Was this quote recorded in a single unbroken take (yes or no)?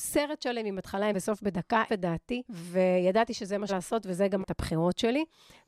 no